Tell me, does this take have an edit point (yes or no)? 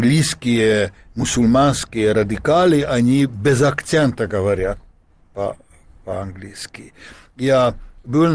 no